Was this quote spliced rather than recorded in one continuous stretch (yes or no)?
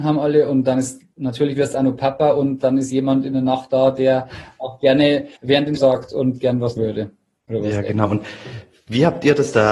yes